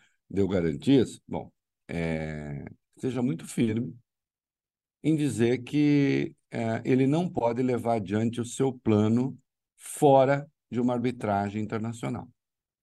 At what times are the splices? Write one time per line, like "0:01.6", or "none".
none